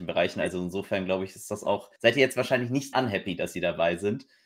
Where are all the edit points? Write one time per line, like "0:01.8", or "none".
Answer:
0:02.0
0:02.9

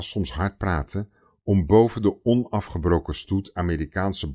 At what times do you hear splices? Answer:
none

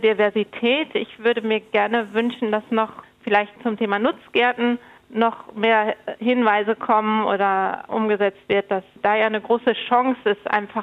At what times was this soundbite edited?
none

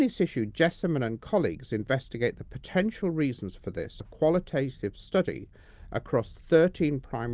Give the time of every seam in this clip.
0:04.0

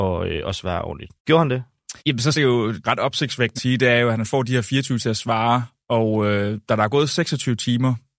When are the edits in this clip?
0:01.2
0:02.0
0:02.3
0:02.8
0:03.6
0:05.0

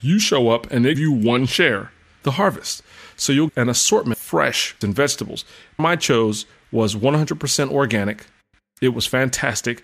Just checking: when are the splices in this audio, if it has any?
0:00.9
0:02.2
0:03.5
0:04.1
0:04.8
0:05.8

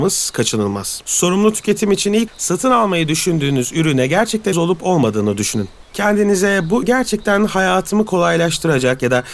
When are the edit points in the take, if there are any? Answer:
0:02.3
0:04.5
0:06.8

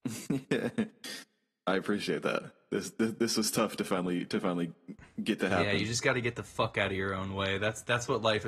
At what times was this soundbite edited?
none

